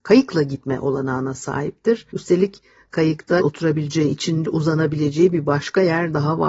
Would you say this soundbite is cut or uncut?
cut